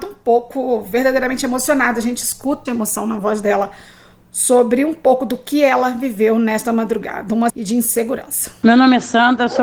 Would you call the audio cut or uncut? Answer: cut